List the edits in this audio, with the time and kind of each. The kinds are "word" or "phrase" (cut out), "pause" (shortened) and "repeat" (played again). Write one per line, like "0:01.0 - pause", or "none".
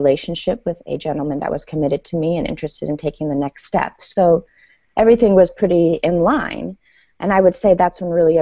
none